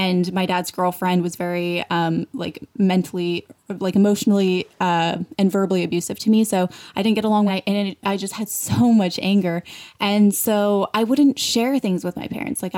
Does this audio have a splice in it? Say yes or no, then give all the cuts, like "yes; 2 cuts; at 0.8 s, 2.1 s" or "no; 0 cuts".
yes; 1 cut; at 7.5 s